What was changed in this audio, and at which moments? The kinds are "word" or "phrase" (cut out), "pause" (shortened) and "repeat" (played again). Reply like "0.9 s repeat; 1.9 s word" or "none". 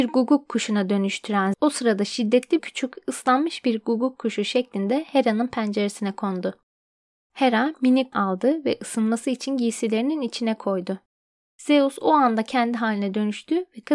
1.5 s word; 2.6 s phrase; 8.1 s phrase